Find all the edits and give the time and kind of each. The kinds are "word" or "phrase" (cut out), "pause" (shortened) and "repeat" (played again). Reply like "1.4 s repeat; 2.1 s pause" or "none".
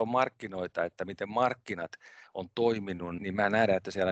3.2 s word